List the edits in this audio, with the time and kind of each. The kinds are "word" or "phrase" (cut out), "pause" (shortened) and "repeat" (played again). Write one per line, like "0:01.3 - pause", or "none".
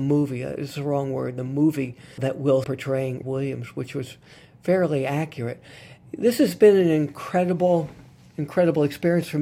0:02.2 - word
0:02.6 - word
0:03.2 - word